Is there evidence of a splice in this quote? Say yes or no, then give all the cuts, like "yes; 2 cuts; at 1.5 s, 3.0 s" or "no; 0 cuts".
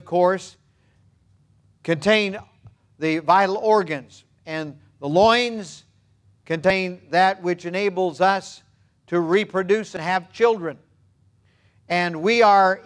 no; 0 cuts